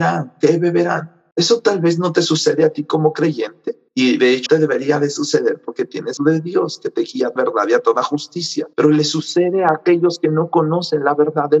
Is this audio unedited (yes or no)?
no